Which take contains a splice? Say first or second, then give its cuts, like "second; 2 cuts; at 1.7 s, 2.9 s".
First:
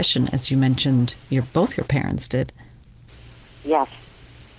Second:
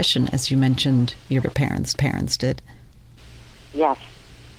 second; 2 cuts; at 1.4 s, 1.9 s